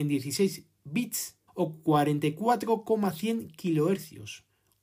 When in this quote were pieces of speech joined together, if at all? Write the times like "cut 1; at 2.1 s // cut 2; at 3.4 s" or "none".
cut 1; at 1.5 s